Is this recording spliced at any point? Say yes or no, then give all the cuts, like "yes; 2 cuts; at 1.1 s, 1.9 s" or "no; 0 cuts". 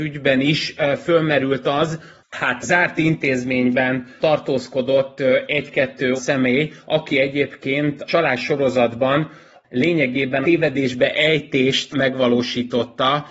yes; 4 cuts; at 2.6 s, 6.2 s, 8.1 s, 10.4 s